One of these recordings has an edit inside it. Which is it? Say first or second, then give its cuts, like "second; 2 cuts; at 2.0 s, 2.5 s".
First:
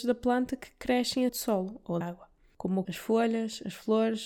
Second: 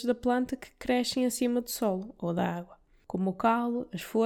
first; 3 cuts; at 1.3 s, 2.0 s, 2.8 s